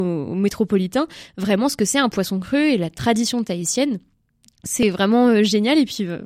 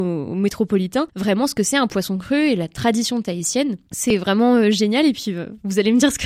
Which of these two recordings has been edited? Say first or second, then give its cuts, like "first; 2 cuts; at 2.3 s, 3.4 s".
second; 2 cuts; at 1.1 s, 3.9 s